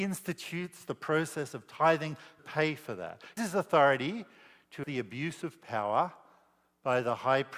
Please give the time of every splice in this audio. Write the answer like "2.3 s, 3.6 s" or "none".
2.4 s, 3.4 s, 4.8 s

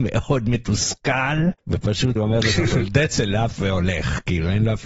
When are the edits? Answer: 2.2 s

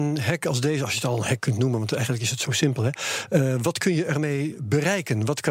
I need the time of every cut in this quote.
none

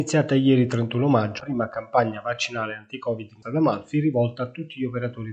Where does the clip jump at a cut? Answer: 1.4 s, 3.4 s

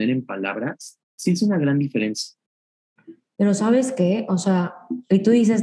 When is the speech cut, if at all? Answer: 1.1 s

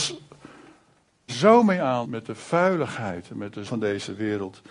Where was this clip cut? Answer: 1.3 s, 2.0 s, 3.6 s

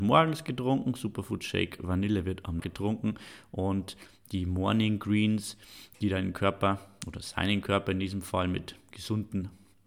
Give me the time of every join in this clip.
2.6 s

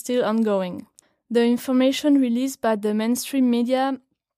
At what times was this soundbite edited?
1.0 s

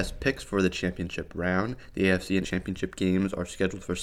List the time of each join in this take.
2.4 s

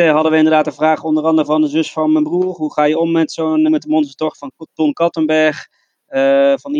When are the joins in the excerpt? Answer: 3.7 s

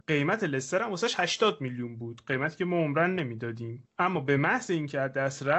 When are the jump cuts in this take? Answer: none

